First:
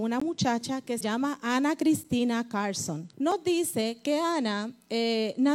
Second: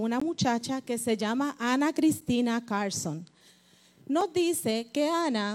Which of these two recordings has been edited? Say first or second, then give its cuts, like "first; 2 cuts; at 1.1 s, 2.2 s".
first; 2 cuts; at 1.0 s, 3.1 s